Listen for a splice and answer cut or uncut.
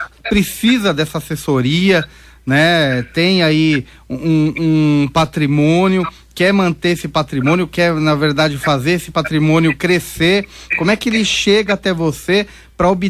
uncut